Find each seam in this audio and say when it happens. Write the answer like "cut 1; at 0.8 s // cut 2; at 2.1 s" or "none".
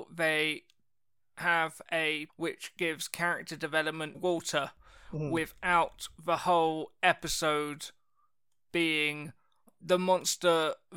cut 1; at 2.3 s // cut 2; at 4.1 s // cut 3; at 9.7 s